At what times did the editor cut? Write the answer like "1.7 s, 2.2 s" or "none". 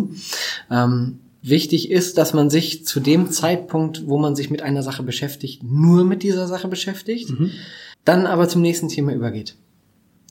7.9 s